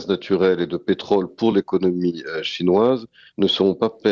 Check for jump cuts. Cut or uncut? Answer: uncut